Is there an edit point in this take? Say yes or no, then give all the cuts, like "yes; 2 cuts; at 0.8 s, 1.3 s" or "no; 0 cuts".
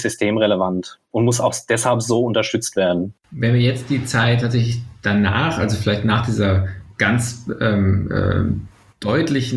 yes; 1 cut; at 3.2 s